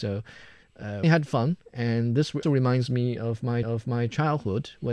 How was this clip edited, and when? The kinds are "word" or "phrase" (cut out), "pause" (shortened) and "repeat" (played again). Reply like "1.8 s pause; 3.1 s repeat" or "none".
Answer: 1.0 s phrase; 2.4 s word; 3.6 s repeat

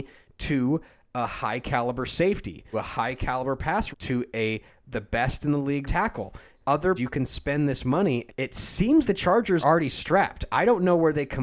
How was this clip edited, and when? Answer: 2.7 s word; 3.9 s word; 5.9 s word; 6.6 s word; 7.0 s word; 8.3 s word; 9.0 s word; 9.6 s word

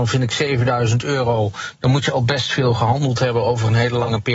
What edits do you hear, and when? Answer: none

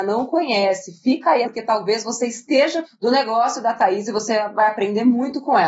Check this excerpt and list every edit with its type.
1.4 s phrase; 2.8 s word

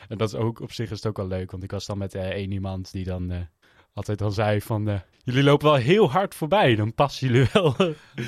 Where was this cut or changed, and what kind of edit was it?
3.6 s pause; 5.1 s pause

